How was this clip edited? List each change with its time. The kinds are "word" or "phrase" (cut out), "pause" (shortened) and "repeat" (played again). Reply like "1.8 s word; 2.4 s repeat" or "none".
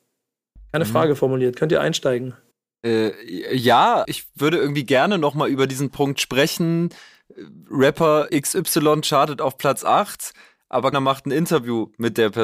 2.5 s pause; 4.0 s word; 8.3 s word; 10.9 s word